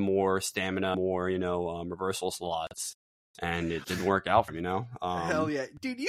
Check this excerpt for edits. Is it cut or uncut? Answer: cut